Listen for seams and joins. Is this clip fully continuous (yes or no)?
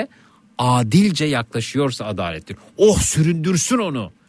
yes